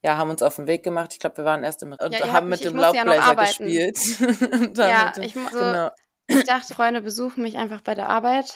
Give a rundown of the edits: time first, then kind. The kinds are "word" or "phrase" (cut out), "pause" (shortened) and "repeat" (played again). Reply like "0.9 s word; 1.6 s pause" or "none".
1.9 s word; 5.5 s word; 6.7 s word